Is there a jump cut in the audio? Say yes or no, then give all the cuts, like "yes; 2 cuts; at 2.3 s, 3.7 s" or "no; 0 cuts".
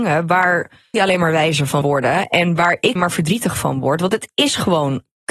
yes; 3 cuts; at 0.9 s, 1.8 s, 3.0 s